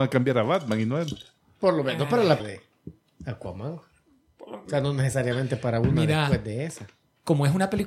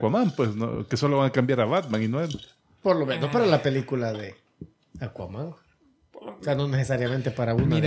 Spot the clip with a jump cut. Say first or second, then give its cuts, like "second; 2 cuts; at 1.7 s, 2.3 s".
first; 1 cut; at 2.4 s